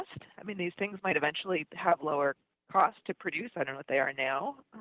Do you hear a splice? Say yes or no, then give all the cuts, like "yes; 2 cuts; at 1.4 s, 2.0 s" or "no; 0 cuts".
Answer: no; 0 cuts